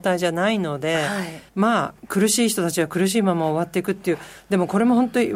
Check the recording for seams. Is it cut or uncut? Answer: cut